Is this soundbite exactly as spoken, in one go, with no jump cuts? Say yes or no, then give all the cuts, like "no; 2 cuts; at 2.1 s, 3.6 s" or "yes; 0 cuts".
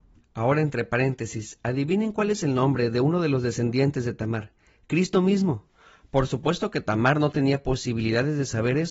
yes; 0 cuts